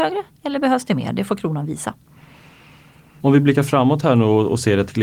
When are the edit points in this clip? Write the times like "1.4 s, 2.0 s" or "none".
none